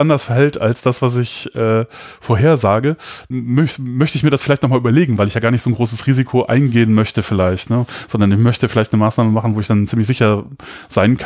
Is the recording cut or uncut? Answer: cut